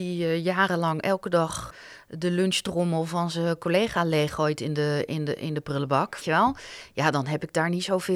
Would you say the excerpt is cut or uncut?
cut